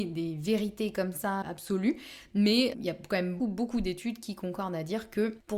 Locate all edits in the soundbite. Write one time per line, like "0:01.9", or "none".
0:01.4
0:02.7
0:03.4